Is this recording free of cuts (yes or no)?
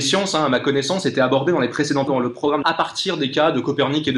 no